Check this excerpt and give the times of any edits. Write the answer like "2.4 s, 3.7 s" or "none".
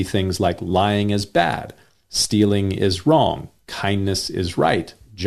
none

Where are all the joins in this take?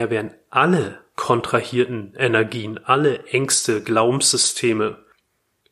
none

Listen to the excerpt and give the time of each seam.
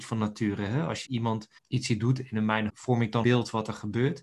1.1 s, 1.6 s, 2.7 s, 3.2 s

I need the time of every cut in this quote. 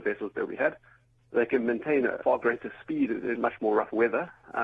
2.2 s, 3.4 s

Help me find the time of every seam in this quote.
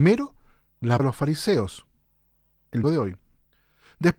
1.0 s, 2.8 s

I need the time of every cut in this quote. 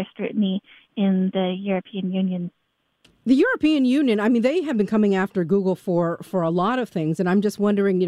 2.8 s

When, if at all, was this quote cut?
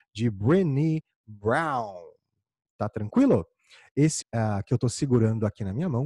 4.2 s

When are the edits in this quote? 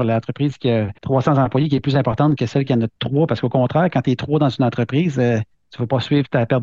1.0 s

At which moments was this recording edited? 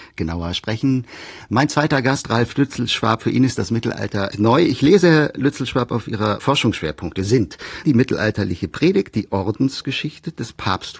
4.3 s, 6.4 s, 7.8 s

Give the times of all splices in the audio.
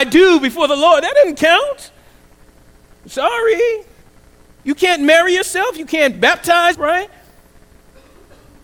3.0 s, 6.7 s

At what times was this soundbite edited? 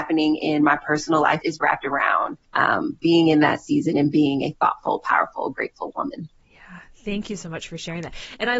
1.4 s, 2.4 s

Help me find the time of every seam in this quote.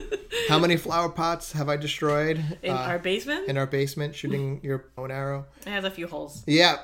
5.0 s

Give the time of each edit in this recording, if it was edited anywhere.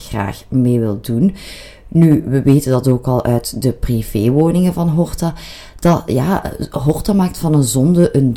none

